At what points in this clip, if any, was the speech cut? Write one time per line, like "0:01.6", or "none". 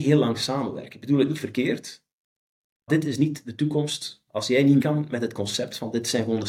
0:02.9
0:04.8